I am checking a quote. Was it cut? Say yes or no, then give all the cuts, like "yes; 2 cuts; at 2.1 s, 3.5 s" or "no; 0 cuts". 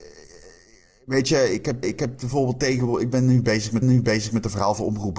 yes; 2 cuts; at 1.8 s, 3.8 s